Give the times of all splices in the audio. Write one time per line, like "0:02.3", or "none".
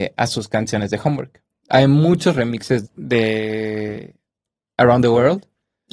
0:02.9